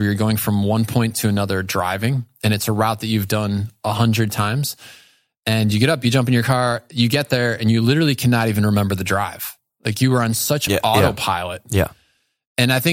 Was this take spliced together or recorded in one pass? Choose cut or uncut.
uncut